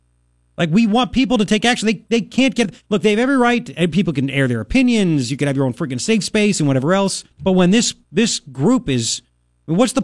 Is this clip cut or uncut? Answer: cut